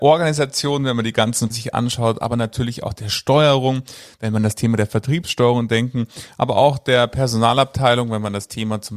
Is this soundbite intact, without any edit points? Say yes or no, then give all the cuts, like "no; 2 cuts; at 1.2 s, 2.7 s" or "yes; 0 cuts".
no; 1 cut; at 1.5 s